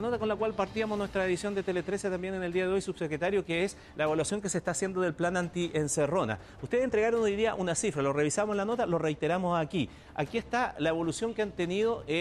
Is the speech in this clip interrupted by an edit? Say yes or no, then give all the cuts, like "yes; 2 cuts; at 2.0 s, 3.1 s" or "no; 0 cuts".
no; 0 cuts